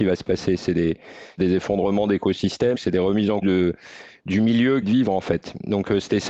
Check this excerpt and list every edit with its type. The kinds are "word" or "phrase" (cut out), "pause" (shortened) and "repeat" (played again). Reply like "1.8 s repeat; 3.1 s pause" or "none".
1.4 s phrase; 2.7 s word; 3.4 s word; 4.8 s phrase